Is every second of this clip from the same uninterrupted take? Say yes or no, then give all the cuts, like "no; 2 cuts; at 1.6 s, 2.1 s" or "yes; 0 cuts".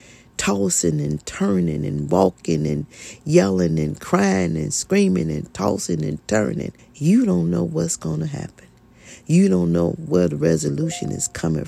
no; 1 cut; at 6.8 s